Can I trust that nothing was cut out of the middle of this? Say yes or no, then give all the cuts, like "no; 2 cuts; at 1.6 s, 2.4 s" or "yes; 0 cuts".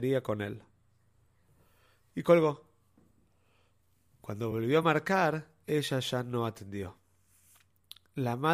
yes; 0 cuts